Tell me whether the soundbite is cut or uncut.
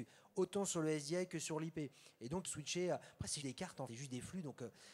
cut